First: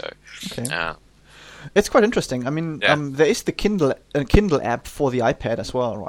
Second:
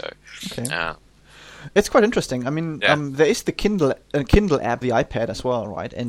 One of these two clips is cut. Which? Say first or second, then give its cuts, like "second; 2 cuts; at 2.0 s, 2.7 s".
second; 1 cut; at 4.8 s